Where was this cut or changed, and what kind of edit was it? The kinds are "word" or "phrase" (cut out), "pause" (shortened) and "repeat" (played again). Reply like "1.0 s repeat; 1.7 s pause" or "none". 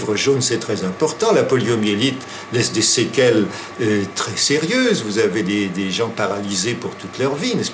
none

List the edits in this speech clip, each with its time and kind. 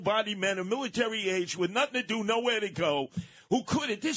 none

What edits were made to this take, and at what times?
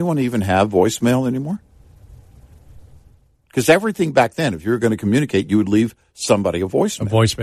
none

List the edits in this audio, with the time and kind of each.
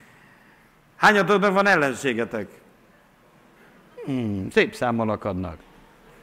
none

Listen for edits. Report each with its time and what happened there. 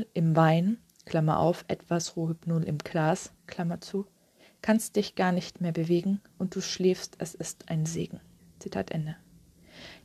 3.4 s pause; 8.4 s pause

